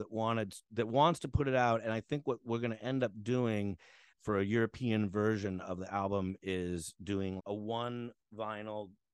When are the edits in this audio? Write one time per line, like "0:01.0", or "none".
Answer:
0:04.1
0:07.4